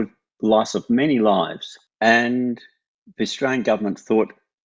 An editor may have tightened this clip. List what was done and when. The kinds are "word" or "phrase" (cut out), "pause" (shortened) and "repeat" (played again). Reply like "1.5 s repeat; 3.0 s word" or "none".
none